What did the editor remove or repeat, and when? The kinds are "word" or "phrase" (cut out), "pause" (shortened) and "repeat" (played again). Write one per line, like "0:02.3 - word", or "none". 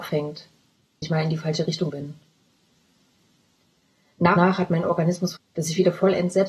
0:01.0 - word
0:01.9 - word
0:04.4 - word
0:05.4 - word